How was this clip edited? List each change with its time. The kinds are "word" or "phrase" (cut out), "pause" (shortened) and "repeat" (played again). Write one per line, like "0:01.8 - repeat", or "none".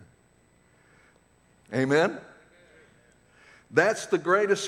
none